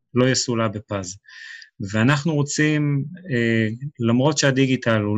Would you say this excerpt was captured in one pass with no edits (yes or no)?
yes